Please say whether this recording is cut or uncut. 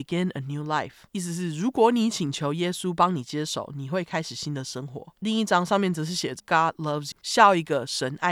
cut